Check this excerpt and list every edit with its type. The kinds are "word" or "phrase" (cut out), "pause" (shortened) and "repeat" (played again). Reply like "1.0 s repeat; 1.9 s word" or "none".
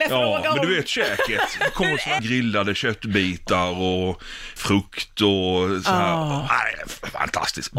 2.2 s phrase; 4.6 s word